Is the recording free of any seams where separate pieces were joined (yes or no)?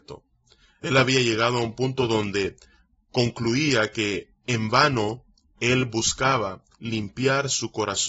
yes